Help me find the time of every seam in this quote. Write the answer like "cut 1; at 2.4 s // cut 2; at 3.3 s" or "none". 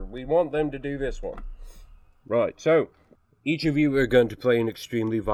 none